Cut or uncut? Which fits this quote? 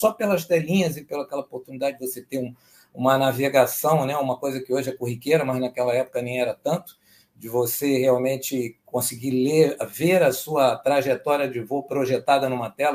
uncut